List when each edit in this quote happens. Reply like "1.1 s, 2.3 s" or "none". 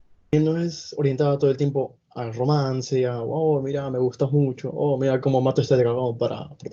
2.0 s